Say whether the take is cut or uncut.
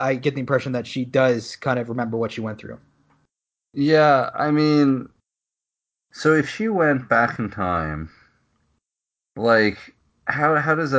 uncut